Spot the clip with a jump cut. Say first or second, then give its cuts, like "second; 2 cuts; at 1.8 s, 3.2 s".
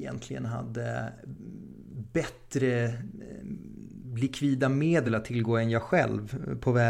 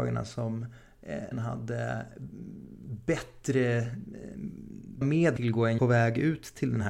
second; 4 cuts; at 1.3 s, 5.0 s, 5.4 s, 5.8 s